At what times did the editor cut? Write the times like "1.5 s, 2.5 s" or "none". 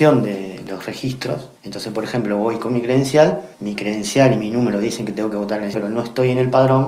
1.6 s, 3.5 s, 5.7 s